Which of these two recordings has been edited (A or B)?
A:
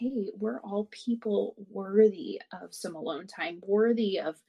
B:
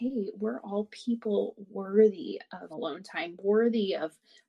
B